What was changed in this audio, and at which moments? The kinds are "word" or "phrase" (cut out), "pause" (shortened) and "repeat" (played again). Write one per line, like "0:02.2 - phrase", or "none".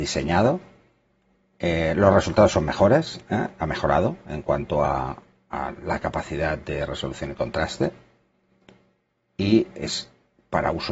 none